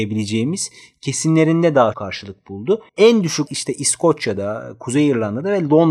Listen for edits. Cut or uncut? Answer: cut